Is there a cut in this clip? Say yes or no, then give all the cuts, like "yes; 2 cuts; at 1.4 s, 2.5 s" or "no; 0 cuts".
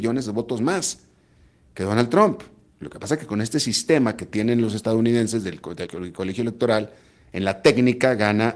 yes; 1 cut; at 5.9 s